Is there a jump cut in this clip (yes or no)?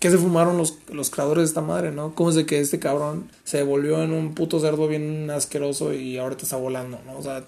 yes